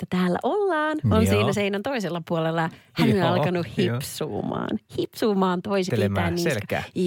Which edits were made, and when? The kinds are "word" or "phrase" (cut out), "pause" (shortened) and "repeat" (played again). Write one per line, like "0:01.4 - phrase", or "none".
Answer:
0:05.9 - phrase